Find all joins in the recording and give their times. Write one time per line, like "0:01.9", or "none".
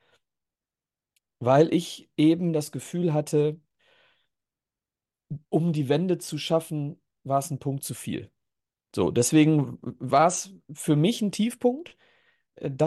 0:05.4